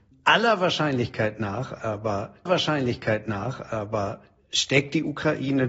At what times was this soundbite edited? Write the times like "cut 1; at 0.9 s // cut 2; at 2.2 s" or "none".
cut 1; at 2.5 s